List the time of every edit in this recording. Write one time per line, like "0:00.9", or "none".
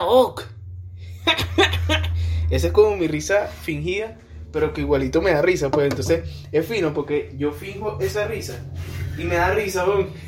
none